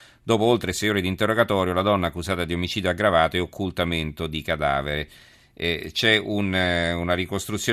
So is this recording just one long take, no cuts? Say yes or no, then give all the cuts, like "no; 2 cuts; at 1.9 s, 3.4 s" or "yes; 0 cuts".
yes; 0 cuts